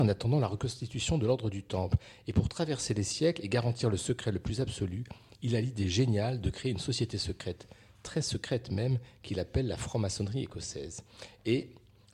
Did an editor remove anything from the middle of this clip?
no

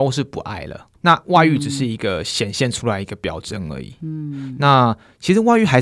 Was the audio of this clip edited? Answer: yes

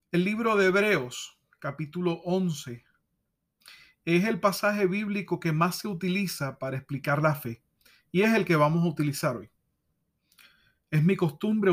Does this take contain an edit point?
no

